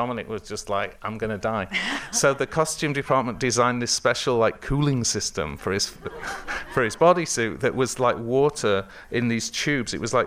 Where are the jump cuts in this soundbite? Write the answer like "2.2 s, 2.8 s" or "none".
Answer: none